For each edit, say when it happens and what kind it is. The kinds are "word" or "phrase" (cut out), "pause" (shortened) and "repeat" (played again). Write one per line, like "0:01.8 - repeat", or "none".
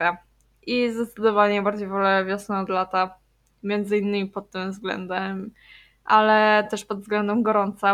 none